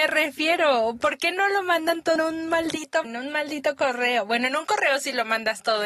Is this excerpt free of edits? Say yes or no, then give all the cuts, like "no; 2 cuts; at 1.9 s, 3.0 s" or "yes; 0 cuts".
no; 2 cuts; at 2.2 s, 3.0 s